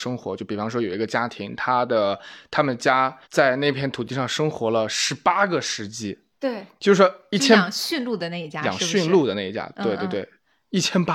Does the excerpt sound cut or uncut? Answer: cut